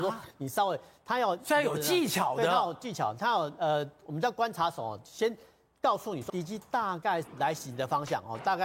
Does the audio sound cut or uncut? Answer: cut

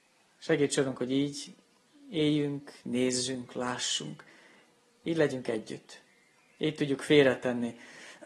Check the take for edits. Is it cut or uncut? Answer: uncut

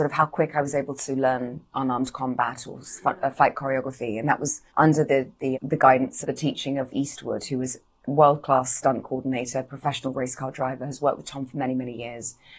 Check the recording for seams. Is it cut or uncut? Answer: cut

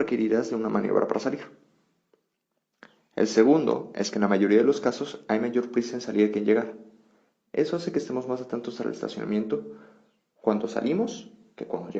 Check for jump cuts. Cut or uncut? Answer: uncut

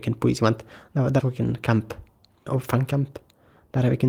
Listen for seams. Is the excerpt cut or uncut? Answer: cut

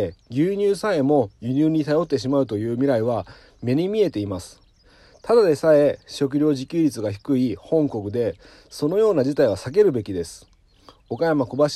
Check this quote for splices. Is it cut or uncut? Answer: uncut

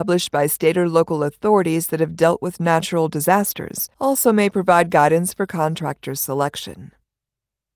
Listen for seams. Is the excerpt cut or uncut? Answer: cut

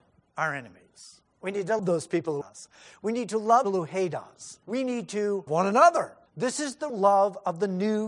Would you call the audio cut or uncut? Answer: cut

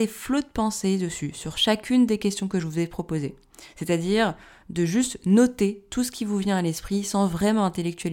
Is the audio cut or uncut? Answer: uncut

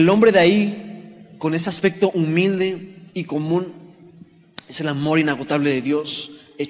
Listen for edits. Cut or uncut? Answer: uncut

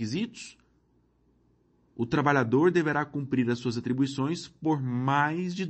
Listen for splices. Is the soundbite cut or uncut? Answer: uncut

